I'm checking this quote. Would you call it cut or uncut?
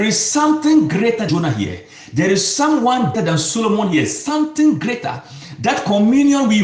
cut